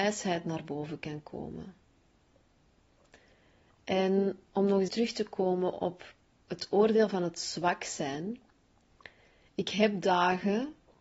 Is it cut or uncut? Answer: cut